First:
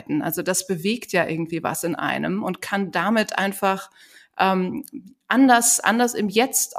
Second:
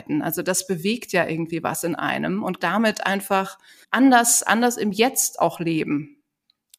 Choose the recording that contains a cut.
second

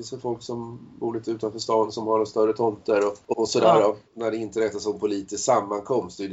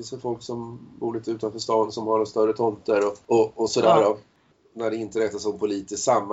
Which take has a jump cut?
first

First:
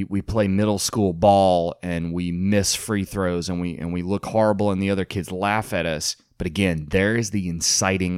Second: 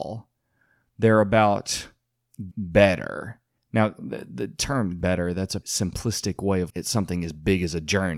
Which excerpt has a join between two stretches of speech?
second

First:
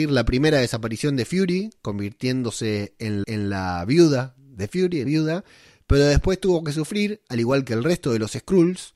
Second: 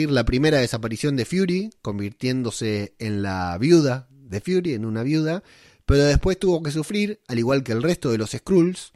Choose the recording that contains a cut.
first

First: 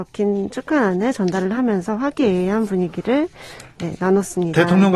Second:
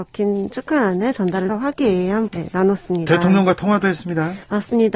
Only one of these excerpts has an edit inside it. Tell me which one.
second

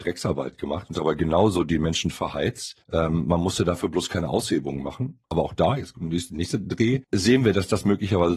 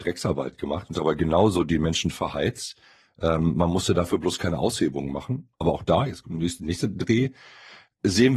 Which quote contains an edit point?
first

